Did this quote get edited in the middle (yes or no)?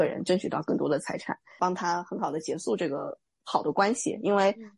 no